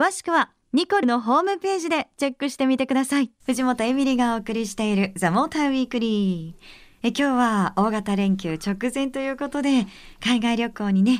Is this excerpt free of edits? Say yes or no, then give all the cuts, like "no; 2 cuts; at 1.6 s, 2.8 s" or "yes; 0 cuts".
no; 2 cuts; at 1.0 s, 3.4 s